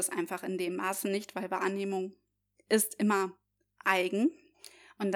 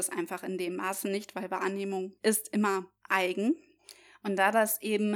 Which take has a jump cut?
second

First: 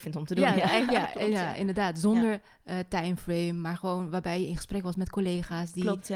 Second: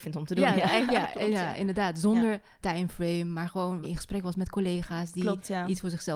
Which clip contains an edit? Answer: second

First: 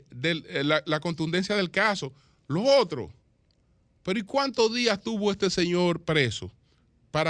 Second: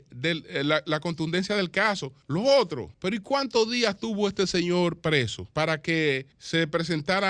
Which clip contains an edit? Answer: second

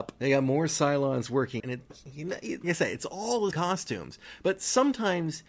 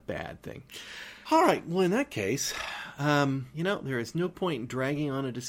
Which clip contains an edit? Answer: first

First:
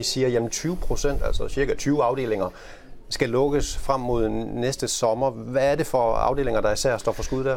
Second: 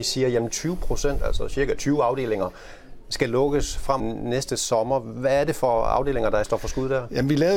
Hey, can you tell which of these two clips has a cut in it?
second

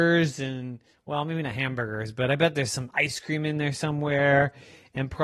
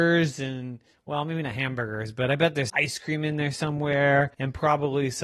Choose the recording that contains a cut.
second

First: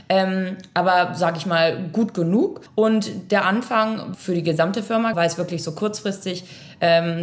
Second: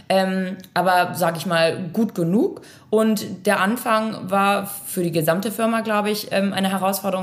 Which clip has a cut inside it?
first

